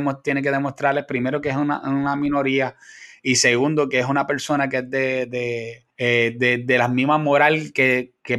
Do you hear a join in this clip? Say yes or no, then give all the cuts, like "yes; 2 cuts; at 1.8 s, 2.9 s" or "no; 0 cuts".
yes; 1 cut; at 5.9 s